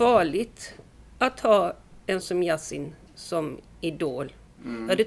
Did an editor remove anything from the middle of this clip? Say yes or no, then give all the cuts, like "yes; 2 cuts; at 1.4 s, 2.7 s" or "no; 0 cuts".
yes; 1 cut; at 2.2 s